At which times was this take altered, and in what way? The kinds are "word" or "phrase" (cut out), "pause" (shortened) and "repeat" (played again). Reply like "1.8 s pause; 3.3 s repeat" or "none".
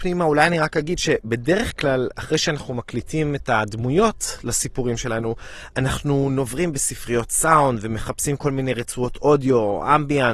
none